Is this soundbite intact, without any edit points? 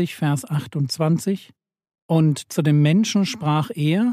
yes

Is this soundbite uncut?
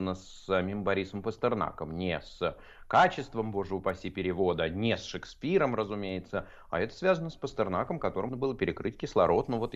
no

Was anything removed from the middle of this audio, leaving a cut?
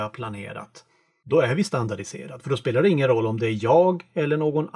no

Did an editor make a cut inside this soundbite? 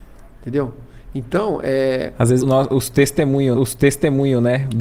yes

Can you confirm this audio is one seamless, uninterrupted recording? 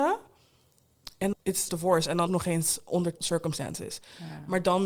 no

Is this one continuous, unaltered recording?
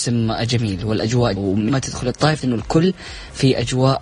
no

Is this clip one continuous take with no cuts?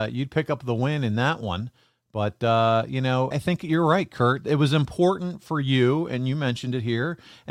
no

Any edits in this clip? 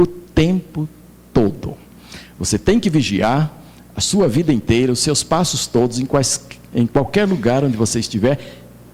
no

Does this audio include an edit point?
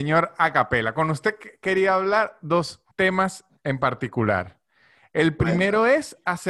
yes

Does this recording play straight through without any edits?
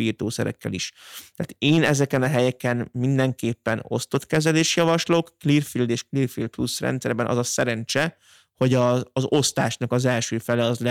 yes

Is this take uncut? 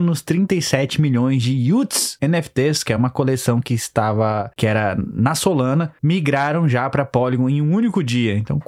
yes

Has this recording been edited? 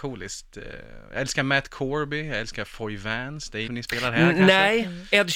yes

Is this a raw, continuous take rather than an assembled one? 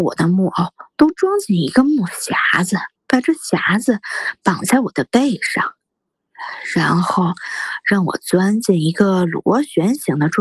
no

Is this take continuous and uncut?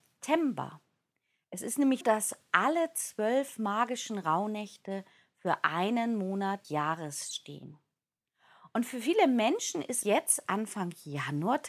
no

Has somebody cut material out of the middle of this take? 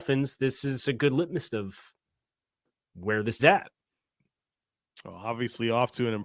yes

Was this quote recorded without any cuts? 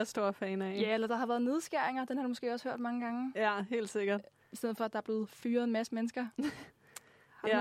yes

